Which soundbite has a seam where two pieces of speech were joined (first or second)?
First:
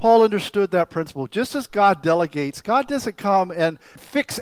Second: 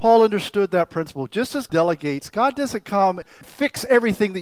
second